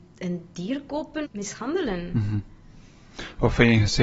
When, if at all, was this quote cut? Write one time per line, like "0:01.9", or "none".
0:01.2